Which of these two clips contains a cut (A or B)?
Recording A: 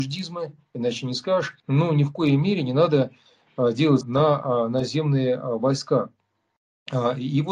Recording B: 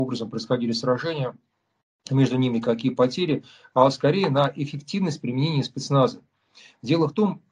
A